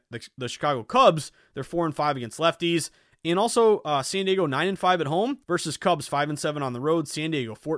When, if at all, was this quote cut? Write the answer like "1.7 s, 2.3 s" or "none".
5.4 s